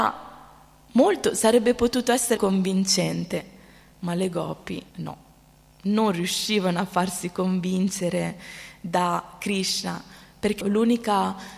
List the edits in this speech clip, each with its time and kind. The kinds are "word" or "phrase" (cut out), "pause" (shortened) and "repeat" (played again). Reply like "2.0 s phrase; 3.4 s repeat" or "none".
2.4 s word; 4.9 s pause; 10.6 s word